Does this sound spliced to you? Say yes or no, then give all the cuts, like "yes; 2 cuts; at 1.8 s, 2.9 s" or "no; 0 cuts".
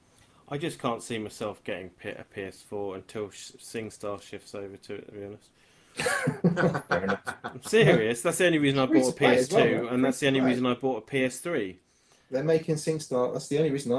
no; 0 cuts